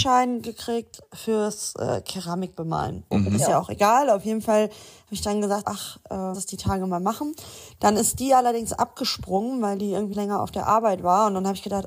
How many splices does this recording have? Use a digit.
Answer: 4